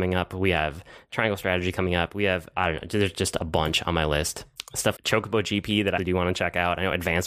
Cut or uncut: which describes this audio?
cut